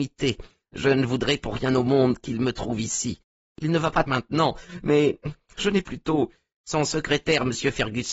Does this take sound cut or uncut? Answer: cut